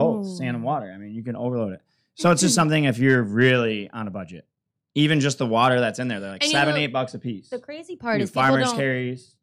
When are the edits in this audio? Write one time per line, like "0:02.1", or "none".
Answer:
none